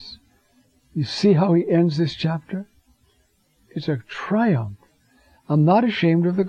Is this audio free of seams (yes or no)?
yes